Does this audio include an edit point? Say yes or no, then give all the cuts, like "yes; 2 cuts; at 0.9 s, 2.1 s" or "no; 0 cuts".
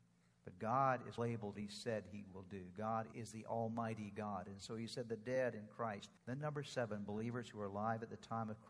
yes; 3 cuts; at 1.2 s, 1.5 s, 6.2 s